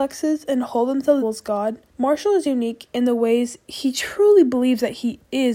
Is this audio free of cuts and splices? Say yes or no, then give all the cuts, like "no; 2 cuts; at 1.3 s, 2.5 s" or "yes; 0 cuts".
no; 2 cuts; at 1.2 s, 1.9 s